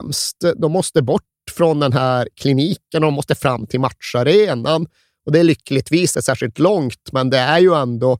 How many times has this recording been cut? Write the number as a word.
one